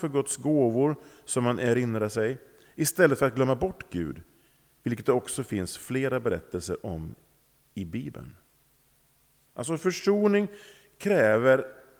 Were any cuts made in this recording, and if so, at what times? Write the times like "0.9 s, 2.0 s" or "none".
none